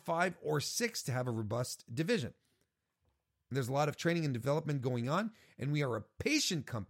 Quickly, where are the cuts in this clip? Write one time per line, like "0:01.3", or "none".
none